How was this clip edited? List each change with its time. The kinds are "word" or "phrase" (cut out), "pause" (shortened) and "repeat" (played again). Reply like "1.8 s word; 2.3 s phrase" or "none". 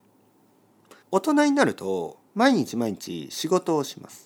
1.0 s pause; 2.2 s pause